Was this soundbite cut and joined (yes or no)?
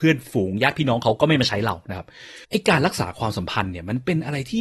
yes